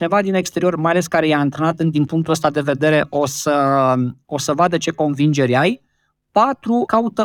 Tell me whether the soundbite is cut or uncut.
uncut